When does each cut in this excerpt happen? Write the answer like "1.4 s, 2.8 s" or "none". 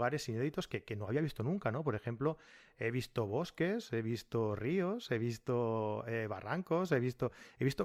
none